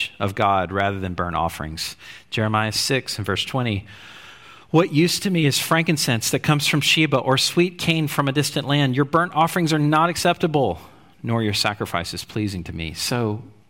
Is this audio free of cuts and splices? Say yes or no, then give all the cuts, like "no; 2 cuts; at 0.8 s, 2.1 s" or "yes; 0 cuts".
yes; 0 cuts